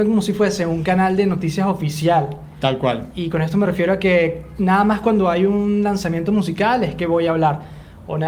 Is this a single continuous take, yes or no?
yes